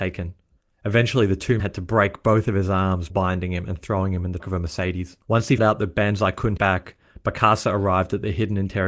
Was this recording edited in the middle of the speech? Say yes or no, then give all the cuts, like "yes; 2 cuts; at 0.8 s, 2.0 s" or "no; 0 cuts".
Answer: yes; 6 cuts; at 1.6 s, 3.1 s, 4.4 s, 5.2 s, 5.6 s, 6.6 s